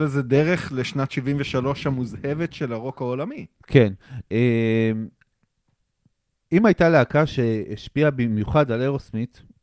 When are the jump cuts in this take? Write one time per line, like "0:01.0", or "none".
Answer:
none